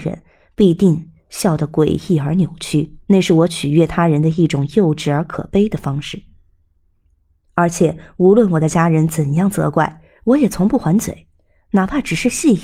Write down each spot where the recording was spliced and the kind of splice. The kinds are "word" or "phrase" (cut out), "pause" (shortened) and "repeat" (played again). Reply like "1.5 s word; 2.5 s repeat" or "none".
3.0 s pause